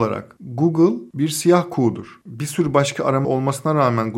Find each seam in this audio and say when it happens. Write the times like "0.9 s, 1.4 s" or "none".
3.2 s